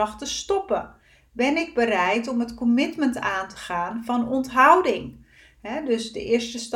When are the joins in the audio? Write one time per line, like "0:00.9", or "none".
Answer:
none